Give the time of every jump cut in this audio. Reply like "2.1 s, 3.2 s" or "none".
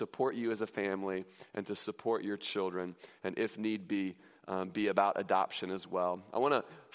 none